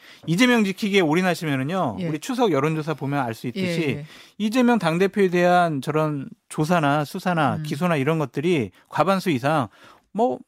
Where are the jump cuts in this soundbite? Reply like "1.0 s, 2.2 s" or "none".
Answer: none